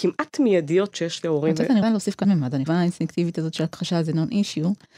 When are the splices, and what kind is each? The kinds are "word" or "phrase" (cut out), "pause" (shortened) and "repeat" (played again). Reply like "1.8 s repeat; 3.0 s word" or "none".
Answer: 0.9 s word; 1.8 s word; 2.2 s word; 2.7 s phrase